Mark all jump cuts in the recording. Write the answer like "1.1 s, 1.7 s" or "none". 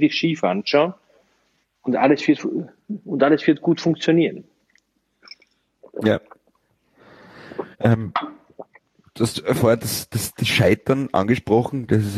7.7 s